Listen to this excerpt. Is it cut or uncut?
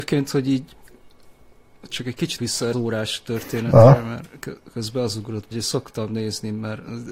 cut